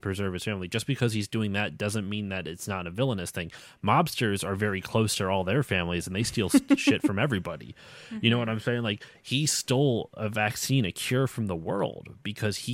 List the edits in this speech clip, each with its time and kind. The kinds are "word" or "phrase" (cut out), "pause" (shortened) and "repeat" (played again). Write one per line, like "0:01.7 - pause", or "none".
none